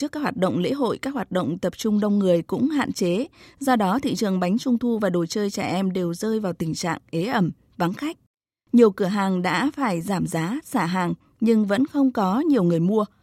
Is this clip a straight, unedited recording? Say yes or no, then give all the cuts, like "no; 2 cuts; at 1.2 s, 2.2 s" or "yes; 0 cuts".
yes; 0 cuts